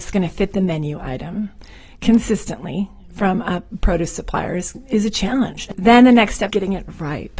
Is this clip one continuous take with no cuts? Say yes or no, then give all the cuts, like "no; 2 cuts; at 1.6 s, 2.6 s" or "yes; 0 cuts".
no; 2 cuts; at 4.7 s, 6.5 s